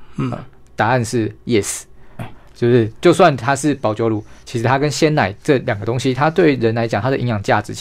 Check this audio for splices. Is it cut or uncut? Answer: cut